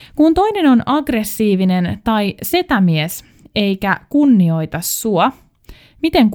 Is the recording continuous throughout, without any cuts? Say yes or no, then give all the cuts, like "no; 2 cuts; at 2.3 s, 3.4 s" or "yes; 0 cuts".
yes; 0 cuts